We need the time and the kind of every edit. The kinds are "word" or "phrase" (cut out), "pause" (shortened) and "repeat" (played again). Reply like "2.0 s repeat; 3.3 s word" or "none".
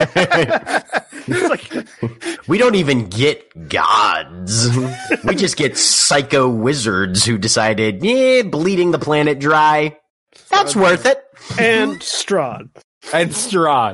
10.1 s pause